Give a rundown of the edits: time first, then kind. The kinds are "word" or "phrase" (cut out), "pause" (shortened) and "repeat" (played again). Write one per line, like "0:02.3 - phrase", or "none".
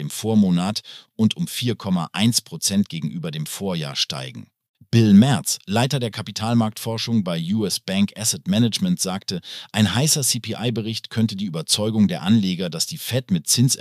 none